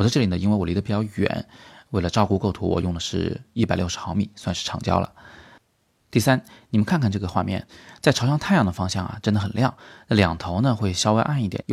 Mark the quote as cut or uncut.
uncut